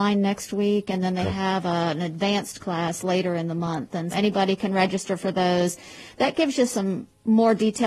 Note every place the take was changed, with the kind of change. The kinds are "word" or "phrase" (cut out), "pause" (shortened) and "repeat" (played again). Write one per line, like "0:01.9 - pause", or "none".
0:04.1 - word